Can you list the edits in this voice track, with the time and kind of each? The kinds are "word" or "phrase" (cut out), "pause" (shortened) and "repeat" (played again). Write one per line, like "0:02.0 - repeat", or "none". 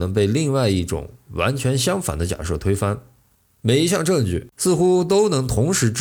0:04.5 - pause